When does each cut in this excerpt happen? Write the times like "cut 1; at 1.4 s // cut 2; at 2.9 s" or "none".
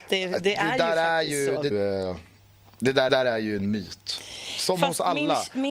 cut 1; at 1.7 s // cut 2; at 3.1 s